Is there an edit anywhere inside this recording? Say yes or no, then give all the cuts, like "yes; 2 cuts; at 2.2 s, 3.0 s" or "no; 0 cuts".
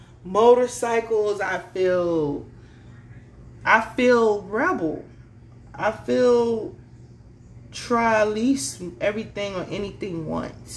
no; 0 cuts